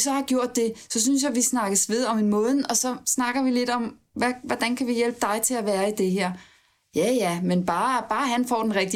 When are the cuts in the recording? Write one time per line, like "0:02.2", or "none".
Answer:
none